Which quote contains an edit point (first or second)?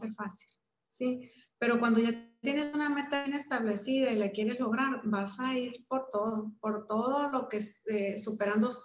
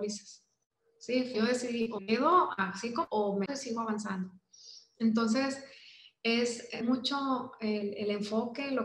second